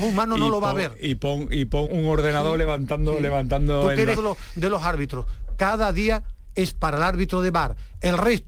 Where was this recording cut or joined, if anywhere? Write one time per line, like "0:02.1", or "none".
0:01.9
0:04.2